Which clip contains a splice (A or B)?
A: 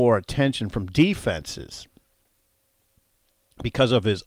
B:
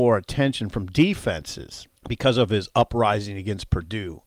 B